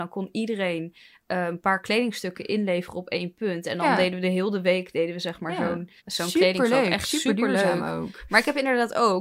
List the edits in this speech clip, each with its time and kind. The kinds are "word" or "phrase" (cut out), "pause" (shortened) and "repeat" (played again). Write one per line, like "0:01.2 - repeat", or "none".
0:06.0 - pause